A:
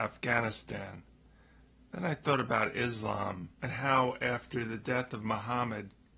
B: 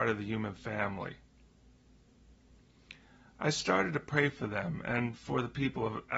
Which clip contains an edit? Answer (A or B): A